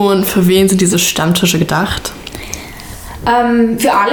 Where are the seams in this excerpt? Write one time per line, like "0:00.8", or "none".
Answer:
none